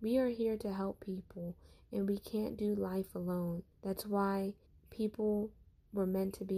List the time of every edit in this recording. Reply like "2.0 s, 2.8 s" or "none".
3.7 s, 4.6 s